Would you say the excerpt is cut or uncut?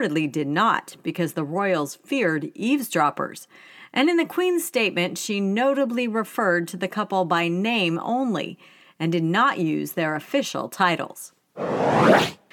uncut